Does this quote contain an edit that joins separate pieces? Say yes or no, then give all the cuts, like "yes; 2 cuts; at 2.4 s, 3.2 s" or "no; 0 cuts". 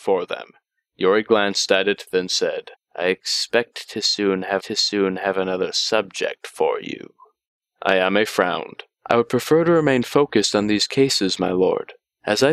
yes; 3 cuts; at 2.7 s, 4.6 s, 8.9 s